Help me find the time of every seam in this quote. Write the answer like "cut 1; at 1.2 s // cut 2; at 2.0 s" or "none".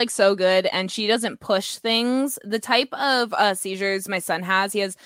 none